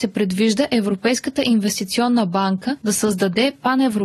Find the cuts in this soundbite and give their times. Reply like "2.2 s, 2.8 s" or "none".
none